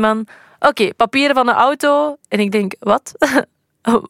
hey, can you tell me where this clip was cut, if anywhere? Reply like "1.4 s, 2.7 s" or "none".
2.2 s